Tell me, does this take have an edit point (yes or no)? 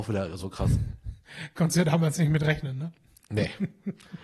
no